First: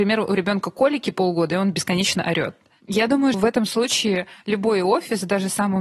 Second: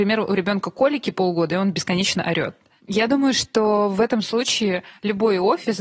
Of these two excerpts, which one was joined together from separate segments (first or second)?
first